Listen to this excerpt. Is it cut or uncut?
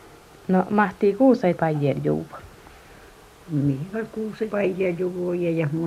cut